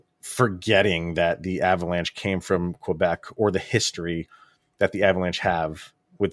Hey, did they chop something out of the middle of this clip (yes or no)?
no